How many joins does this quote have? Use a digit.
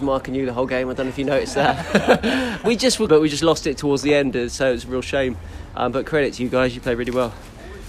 2